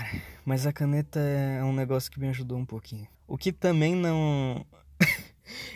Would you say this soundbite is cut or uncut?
cut